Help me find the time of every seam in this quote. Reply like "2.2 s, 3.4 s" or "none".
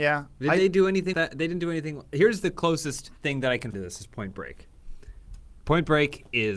1.1 s, 3.2 s, 3.7 s

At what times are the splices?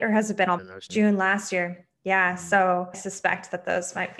2.9 s

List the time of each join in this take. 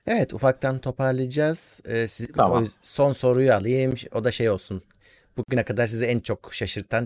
2.3 s

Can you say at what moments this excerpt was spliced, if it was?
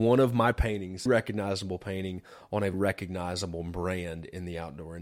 1.1 s, 2.7 s

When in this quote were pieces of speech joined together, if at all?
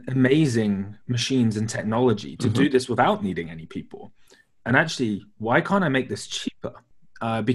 none

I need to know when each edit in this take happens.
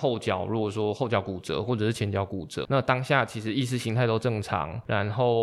2.6 s

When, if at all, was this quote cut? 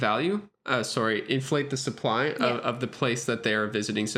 none

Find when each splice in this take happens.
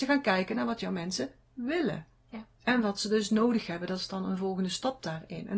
2.5 s

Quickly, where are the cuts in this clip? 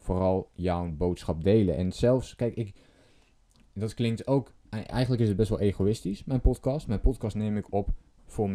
none

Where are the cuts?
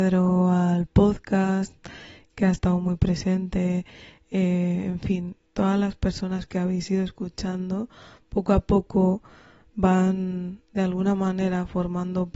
none

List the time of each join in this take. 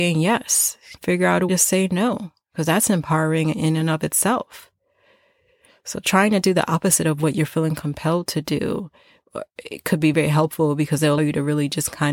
1.0 s, 1.5 s, 10.1 s, 11.2 s

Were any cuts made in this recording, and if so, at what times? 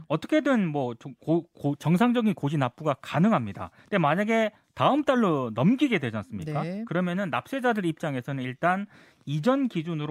3.8 s

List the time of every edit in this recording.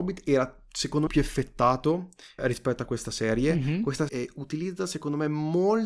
1.1 s, 2.4 s, 4.1 s

